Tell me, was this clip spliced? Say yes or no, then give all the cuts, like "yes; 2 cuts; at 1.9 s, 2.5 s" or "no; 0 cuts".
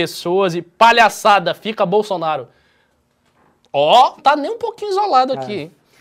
yes; 1 cut; at 4.2 s